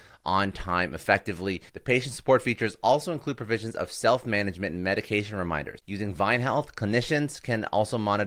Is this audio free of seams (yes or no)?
no